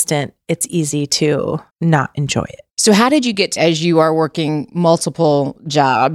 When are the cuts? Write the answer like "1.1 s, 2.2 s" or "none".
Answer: 1.7 s, 2.7 s, 3.6 s